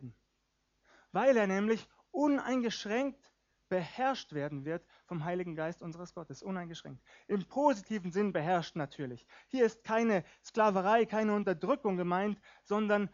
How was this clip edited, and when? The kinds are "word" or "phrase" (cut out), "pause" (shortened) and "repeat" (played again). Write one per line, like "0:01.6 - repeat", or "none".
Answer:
none